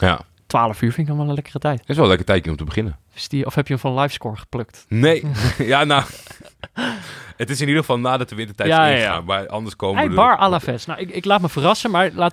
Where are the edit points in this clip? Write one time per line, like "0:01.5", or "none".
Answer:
none